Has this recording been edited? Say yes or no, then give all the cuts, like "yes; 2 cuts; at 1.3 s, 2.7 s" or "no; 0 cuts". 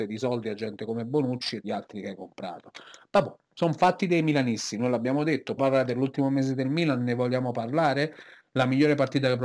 yes; 2 cuts; at 1.6 s, 5.6 s